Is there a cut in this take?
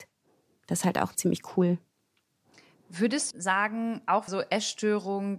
yes; 3 cuts; at 1.1 s, 3.3 s, 4.3 s

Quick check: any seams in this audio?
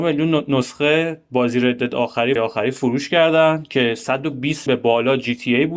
yes; 2 cuts; at 2.4 s, 4.7 s

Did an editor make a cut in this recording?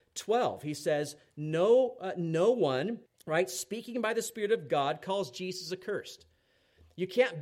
yes; 1 cut; at 3.1 s

